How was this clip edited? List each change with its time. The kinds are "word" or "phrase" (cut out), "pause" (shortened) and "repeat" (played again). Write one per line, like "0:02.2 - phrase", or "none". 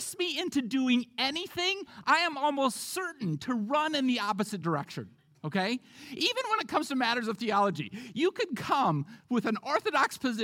none